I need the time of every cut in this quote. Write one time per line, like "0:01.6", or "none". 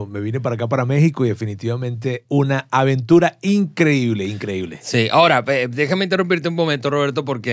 0:02.2